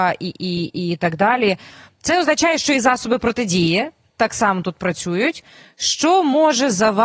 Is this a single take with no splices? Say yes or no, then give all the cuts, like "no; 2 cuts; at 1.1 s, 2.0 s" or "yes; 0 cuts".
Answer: yes; 0 cuts